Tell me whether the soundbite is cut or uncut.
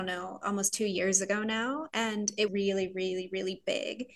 cut